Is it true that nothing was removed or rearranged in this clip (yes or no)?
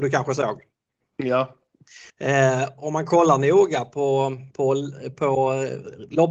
no